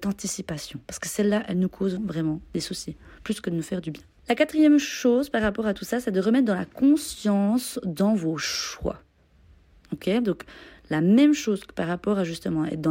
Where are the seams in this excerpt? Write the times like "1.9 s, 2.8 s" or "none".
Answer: 2.0 s